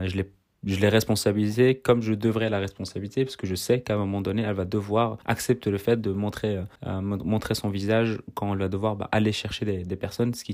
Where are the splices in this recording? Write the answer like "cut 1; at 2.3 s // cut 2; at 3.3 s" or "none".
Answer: cut 1; at 5.2 s // cut 2; at 6.8 s